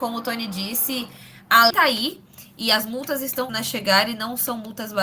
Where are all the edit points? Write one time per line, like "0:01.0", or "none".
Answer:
0:01.7
0:03.5